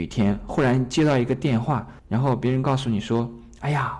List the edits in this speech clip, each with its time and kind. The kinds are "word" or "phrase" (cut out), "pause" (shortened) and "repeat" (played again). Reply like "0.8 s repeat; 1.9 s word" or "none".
2.0 s pause